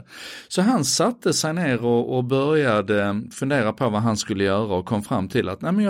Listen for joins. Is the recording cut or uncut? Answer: uncut